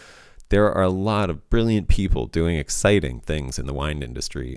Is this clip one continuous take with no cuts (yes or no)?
no